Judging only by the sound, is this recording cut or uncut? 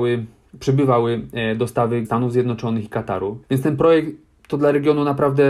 cut